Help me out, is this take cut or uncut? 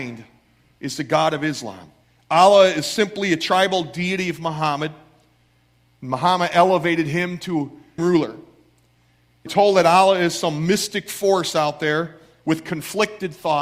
cut